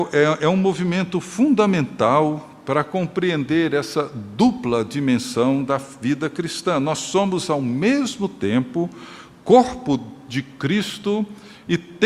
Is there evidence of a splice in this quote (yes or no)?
no